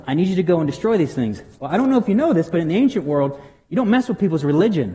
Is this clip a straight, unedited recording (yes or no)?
yes